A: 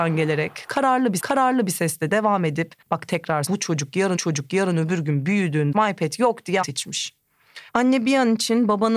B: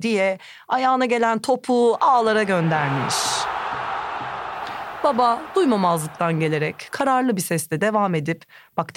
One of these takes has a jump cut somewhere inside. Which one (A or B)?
A